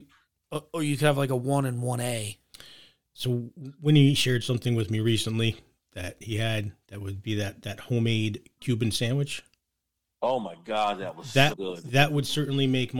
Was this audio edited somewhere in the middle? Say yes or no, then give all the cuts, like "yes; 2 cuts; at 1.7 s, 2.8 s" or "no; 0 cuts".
yes; 1 cut; at 11.5 s